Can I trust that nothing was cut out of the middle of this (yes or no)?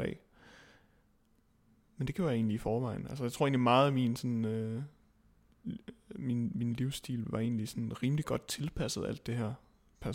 yes